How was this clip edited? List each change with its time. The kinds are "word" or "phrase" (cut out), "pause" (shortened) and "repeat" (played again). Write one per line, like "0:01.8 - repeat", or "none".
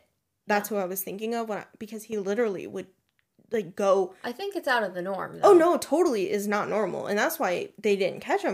0:03.7 - word